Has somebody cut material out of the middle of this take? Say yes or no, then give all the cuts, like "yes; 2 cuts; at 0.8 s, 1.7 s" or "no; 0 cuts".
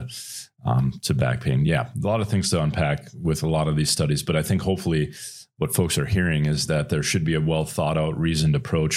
no; 0 cuts